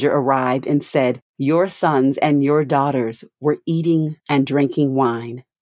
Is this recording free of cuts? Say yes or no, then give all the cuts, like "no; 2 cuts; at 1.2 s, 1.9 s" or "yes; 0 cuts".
no; 1 cut; at 1.3 s